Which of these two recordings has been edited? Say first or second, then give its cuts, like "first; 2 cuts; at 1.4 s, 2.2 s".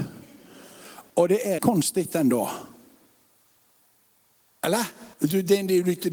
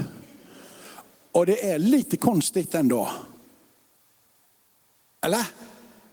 first; 3 cuts; at 1.1 s, 1.6 s, 5.1 s